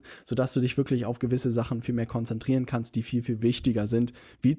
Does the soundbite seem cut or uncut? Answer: cut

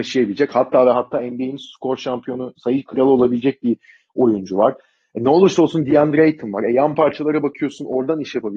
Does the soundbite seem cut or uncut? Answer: uncut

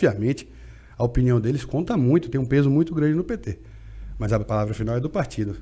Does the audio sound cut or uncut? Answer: uncut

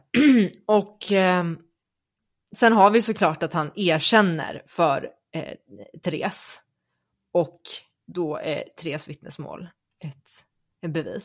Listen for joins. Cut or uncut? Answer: uncut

